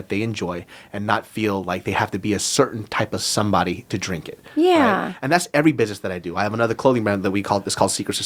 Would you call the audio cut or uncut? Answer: uncut